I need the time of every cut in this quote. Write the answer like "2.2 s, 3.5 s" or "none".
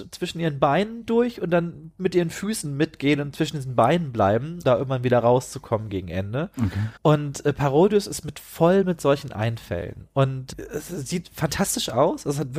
4.6 s, 7.0 s